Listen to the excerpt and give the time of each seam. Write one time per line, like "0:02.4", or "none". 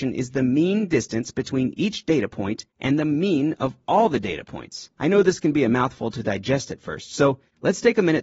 0:04.9